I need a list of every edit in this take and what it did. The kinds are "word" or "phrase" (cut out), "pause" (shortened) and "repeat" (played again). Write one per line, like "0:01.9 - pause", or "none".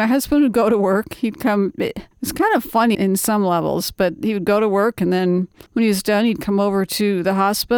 0:02.1 - pause
0:02.9 - word
0:05.7 - pause